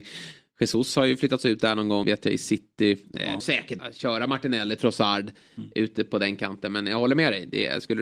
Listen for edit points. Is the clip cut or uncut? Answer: cut